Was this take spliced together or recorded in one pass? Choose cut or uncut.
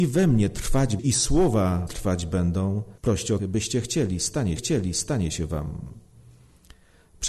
cut